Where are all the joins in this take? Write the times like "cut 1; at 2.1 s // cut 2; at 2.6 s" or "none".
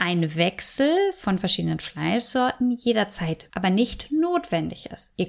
cut 1; at 3.5 s